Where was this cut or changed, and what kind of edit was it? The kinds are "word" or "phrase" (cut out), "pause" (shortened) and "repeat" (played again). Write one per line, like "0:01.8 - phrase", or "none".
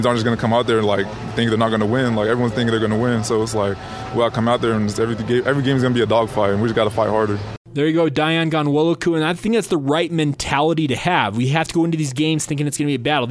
none